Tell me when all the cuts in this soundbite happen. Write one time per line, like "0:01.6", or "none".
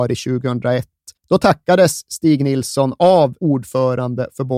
0:01.2
0:03.4